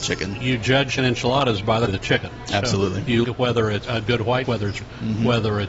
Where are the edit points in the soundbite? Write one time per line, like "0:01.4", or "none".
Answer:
0:01.0
0:01.9
0:03.2
0:03.8
0:04.4
0:04.8